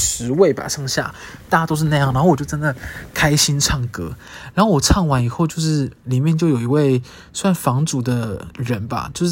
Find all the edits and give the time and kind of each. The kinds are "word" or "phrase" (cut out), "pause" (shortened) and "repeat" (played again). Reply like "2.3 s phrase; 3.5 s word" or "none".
none